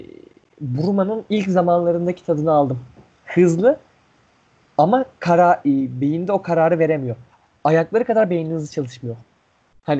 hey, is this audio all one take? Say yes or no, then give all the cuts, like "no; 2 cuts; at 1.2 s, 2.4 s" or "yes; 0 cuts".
yes; 0 cuts